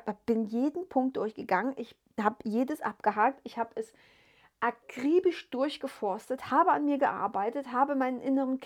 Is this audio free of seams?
yes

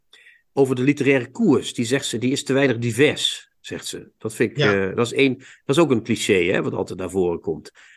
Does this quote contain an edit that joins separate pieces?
no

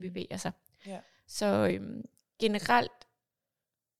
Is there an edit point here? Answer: no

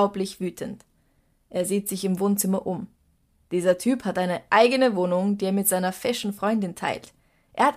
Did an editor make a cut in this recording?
no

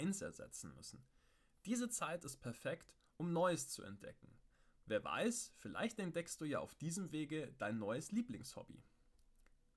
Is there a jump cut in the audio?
no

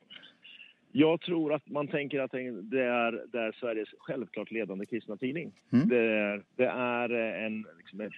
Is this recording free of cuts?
no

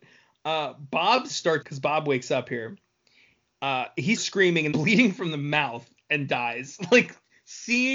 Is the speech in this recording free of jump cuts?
no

